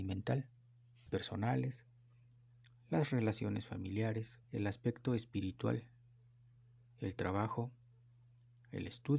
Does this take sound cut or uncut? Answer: cut